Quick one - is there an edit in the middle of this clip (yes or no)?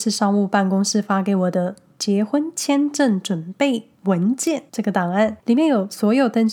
yes